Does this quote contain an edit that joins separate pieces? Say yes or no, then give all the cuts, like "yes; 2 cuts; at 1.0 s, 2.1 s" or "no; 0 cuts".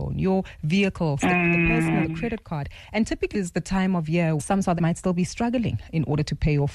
yes; 5 cuts; at 1.2 s, 2.0 s, 3.3 s, 4.4 s, 4.8 s